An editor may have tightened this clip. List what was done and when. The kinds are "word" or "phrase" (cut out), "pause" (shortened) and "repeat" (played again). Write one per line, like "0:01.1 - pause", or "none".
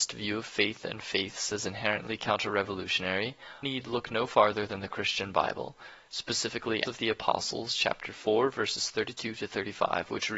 0:03.6 - word
0:06.8 - word